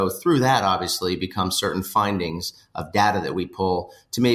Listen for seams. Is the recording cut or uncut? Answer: uncut